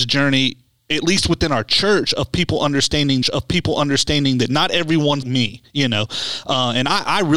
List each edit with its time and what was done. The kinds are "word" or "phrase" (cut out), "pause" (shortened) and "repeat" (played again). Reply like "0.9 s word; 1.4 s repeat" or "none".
3.2 s repeat; 5.2 s word